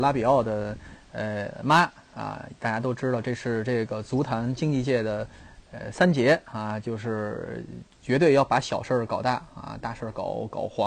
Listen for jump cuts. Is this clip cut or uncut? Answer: cut